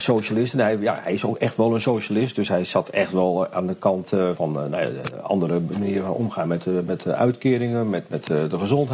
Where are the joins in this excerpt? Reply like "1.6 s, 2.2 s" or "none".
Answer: 4.4 s